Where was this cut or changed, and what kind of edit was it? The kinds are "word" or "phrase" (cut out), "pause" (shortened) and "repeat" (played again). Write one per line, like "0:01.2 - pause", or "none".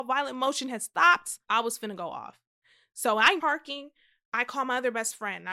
0:01.4 - pause
0:03.4 - phrase

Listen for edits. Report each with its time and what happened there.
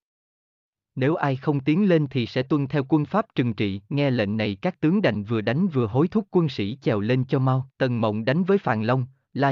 0:03.8 - pause
0:07.7 - pause

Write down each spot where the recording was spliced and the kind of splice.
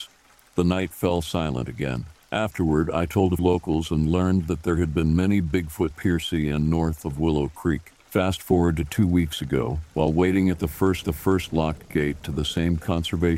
0:02.1 - pause
0:03.4 - word
0:05.9 - phrase
0:08.0 - pause
0:11.0 - repeat

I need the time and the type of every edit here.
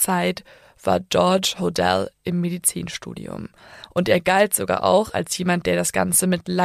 none

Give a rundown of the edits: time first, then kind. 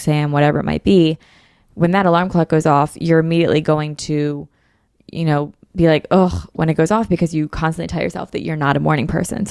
none

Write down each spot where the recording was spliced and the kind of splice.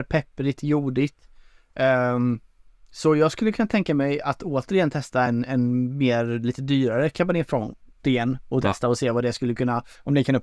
none

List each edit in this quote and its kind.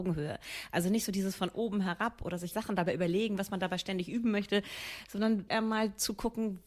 0:02.5 - word
0:05.5 - word

